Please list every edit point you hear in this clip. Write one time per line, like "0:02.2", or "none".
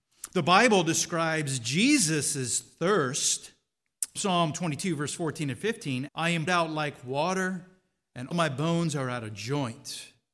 0:04.1
0:06.1
0:06.5
0:08.3